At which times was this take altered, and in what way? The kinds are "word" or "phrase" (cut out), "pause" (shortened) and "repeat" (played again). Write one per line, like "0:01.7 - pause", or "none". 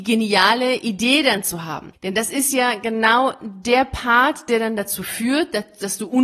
none